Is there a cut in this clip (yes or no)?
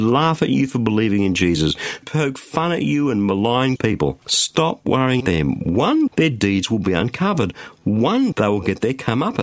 yes